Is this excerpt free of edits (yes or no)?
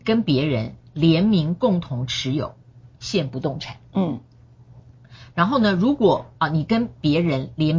no